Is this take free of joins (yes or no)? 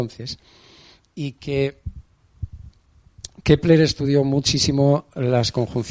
yes